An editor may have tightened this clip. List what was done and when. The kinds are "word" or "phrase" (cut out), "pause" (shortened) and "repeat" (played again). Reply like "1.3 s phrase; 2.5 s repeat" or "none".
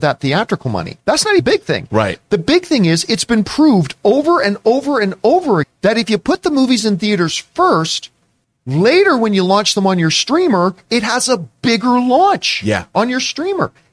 1.0 s pause; 1.4 s word; 5.6 s word; 8.4 s pause